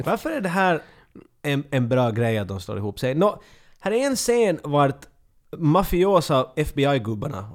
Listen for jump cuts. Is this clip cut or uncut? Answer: uncut